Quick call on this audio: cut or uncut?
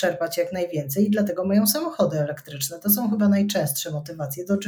uncut